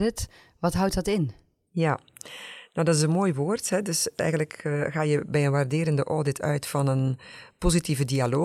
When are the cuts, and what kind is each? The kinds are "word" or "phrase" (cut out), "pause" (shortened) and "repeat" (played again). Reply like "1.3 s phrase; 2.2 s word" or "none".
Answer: none